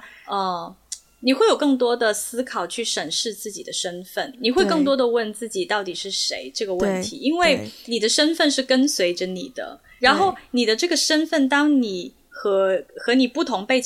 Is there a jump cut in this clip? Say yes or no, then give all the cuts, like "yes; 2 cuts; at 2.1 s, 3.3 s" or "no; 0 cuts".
yes; 1 cut; at 12.9 s